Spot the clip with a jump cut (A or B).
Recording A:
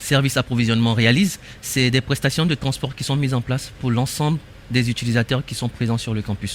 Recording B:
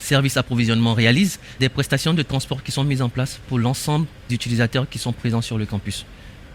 B